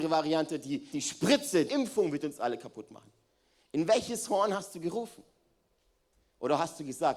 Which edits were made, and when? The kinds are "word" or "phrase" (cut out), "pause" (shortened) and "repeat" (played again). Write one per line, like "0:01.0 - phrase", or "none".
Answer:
0:00.9 - word
0:01.7 - word

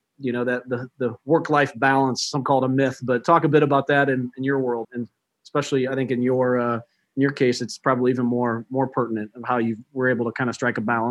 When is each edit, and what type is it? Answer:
0:04.8 - word

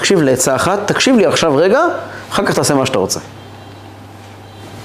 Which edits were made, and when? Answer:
none

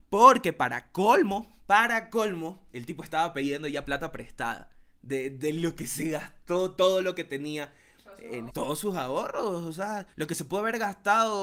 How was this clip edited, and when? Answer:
0:02.7 - pause
0:04.9 - pause
0:06.8 - word
0:08.5 - word
0:10.1 - pause

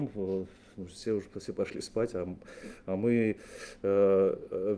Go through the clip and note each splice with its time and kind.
none

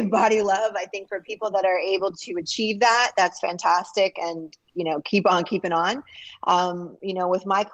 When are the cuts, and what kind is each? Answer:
none

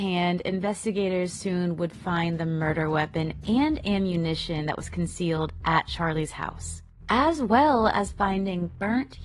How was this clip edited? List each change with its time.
none

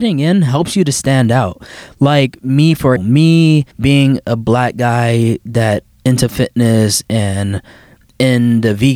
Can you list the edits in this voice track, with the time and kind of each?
0:03.0 - word
0:03.7 - pause
0:05.9 - word

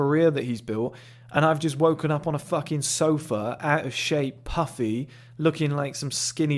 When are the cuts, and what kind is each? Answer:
none

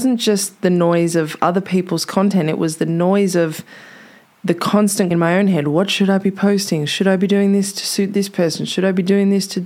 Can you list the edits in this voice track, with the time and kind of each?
0:05.1 - word

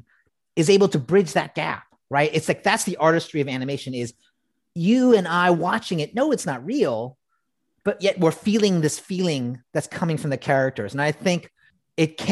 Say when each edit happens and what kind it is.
none

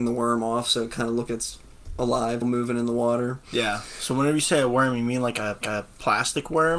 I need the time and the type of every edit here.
0:01.3 - word
0:02.4 - word
0:05.6 - repeat

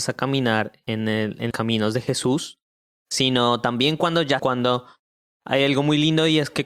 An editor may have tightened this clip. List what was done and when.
0:01.5 - word
0:04.4 - phrase

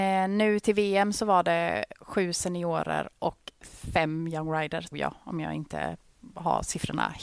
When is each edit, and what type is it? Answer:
0:04.9 - word

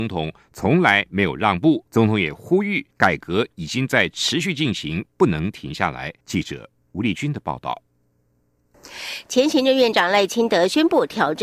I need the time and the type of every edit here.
0:01.9 - pause
0:02.9 - pause
0:06.2 - pause

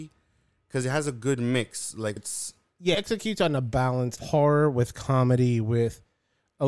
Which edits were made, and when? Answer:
0:02.2 - word
0:02.9 - word
0:04.2 - word

